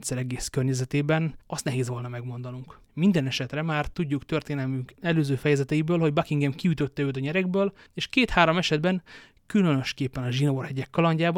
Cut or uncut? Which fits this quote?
cut